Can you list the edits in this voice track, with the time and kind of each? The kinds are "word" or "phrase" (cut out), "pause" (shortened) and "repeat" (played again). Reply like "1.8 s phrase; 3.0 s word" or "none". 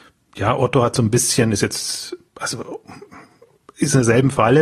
none